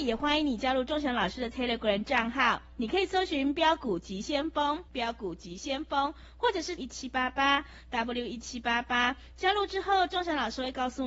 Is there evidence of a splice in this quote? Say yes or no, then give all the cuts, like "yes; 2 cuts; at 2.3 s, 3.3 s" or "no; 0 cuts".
yes; 2 cuts; at 4.9 s, 6.8 s